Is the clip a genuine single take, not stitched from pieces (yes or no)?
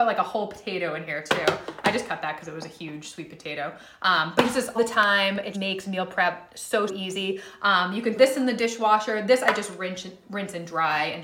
no